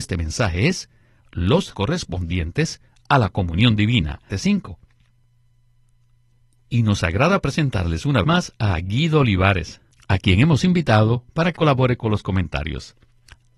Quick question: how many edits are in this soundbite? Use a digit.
4